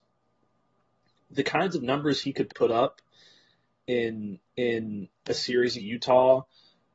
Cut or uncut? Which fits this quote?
cut